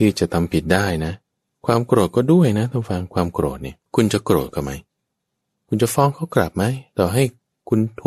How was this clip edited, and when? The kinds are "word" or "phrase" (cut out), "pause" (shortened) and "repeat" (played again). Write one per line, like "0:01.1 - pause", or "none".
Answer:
0:01.4 - pause
0:03.8 - pause

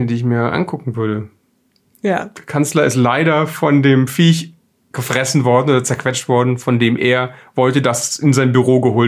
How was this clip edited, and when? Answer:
none

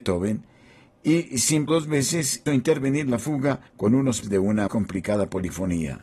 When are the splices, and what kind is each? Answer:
0:01.7 - word
0:02.5 - word
0:03.7 - pause
0:04.2 - word
0:04.7 - word

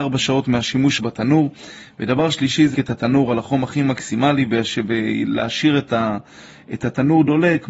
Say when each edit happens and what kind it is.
0:01.0 - phrase
0:02.7 - word

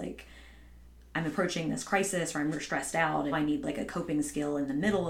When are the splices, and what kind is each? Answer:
0:02.5 - phrase
0:03.3 - word

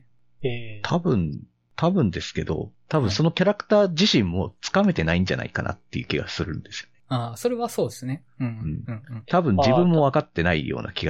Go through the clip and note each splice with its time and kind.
none

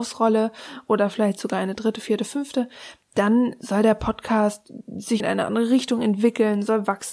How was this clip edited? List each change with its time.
0:05.2 - word

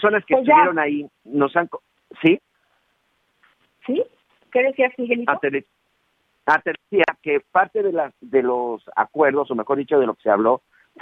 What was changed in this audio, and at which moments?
none

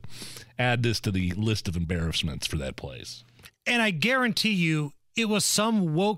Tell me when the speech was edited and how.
none

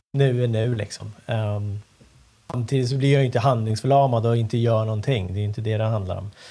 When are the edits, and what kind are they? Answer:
none

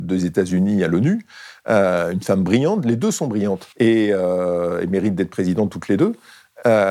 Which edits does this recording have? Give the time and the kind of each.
0:03.7 - pause

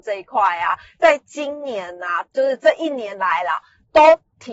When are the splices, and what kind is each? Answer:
0:02.3 - pause

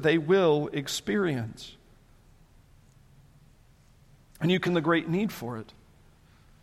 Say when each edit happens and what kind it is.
0:04.7 - word

